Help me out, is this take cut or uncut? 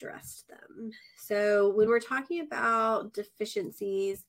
uncut